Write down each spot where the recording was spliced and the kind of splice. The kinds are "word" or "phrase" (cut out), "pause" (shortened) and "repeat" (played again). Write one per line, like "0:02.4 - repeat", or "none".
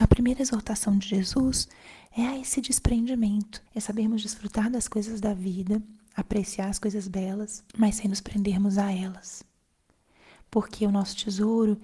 0:03.7 - pause
0:07.7 - pause

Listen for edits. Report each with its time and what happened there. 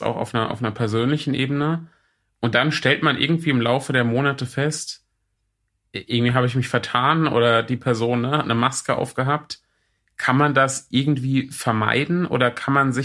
none

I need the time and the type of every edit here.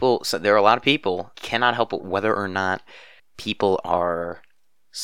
0:01.3 - word
0:02.0 - word
0:03.2 - pause

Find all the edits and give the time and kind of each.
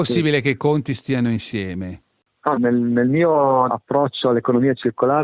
0:02.6 - word
0:03.7 - word

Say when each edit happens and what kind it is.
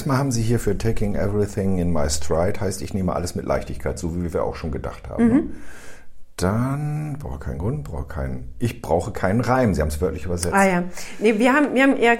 none

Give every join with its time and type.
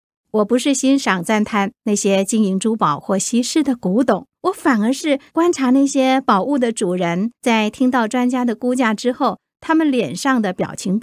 0:04.3 - pause
0:05.3 - pause
0:07.3 - pause

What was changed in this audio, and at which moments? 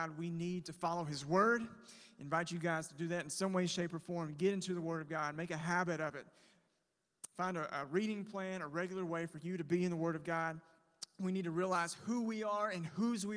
none

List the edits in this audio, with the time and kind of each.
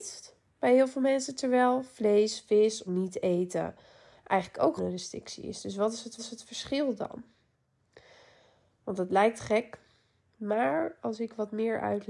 0:02.9 - phrase
0:04.8 - word
0:06.2 - repeat

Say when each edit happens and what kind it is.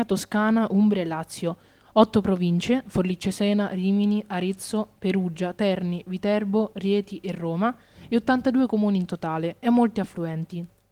none

